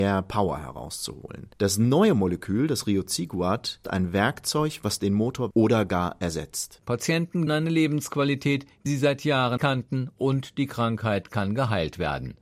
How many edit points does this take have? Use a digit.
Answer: 6